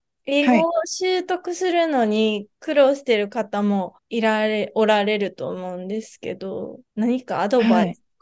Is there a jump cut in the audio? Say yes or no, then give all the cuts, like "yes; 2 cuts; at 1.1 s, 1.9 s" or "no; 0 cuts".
yes; 2 cuts; at 4.0 s, 6.9 s